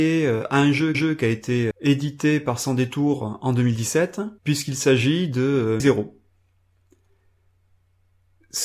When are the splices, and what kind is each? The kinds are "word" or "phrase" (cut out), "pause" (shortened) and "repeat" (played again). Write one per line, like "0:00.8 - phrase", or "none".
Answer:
0:00.9 - repeat
0:01.7 - word
0:04.4 - pause
0:05.8 - phrase